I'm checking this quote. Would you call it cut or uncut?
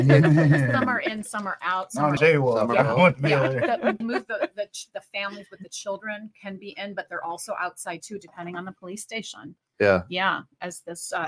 cut